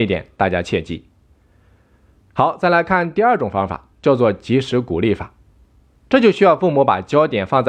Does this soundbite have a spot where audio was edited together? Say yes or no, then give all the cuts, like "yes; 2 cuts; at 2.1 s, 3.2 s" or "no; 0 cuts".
yes; 1 cut; at 3.9 s